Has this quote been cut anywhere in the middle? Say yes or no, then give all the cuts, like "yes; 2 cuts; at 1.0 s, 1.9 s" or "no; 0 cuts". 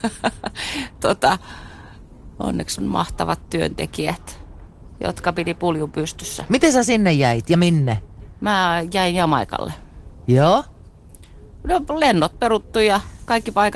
yes; 1 cut; at 2.8 s